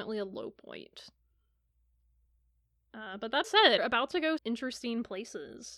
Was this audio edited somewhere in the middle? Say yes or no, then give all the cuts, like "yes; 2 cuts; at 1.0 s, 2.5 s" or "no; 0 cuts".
yes; 3 cuts; at 3.4 s, 3.8 s, 4.4 s